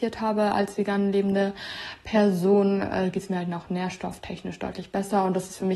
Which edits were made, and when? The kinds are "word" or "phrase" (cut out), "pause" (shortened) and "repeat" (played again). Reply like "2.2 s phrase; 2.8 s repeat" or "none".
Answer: none

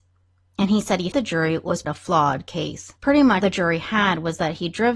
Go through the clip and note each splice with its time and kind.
1.1 s word; 1.8 s word; 3.0 s pause; 3.4 s word

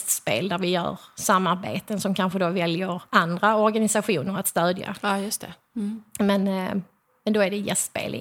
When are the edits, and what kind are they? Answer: 3.1 s pause

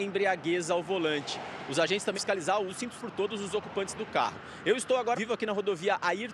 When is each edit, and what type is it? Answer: 2.1 s word; 2.7 s word; 3.0 s word; 5.1 s word

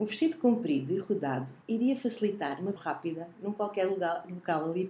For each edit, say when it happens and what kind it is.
1.6 s pause; 2.8 s word

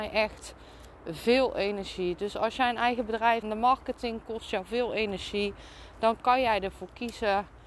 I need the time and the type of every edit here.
3.4 s phrase

